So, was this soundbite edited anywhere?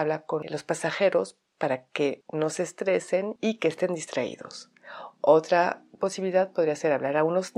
no; 0 cuts

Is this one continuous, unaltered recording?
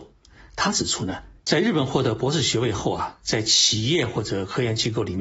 no; 1 cut; at 1.4 s

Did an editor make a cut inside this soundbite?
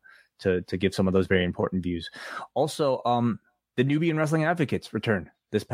no; 0 cuts

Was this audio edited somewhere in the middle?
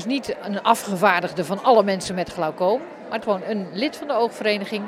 yes; 1 cut; at 3.2 s

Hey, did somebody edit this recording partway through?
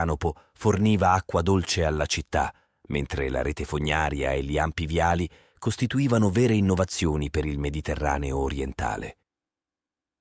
no; 0 cuts

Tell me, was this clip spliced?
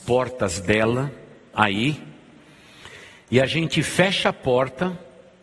yes; 1 cut; at 1.5 s

